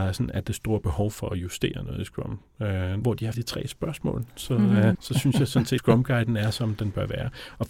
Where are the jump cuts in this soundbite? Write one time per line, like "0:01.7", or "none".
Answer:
0:03.0
0:03.3
0:04.9
0:05.8